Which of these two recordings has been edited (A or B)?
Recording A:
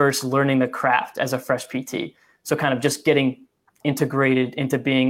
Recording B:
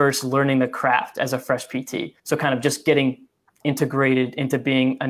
B